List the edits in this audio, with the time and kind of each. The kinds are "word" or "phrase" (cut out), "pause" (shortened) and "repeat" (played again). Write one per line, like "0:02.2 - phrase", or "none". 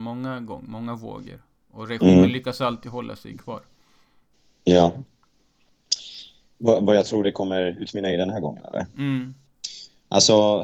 none